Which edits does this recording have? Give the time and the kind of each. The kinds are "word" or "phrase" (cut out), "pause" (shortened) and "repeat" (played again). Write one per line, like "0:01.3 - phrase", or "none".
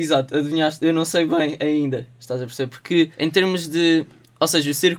0:03.1 - pause